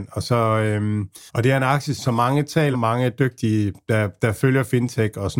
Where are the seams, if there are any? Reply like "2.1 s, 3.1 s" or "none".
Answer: 1.3 s, 2.0 s, 2.7 s